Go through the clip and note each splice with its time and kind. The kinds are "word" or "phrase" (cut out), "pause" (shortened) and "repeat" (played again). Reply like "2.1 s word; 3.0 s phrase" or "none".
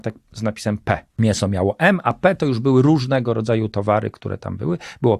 1.1 s pause